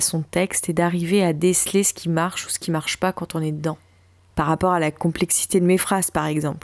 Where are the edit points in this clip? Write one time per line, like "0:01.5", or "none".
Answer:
none